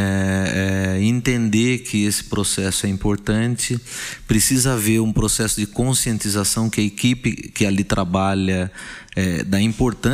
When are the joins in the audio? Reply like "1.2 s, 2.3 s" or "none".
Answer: none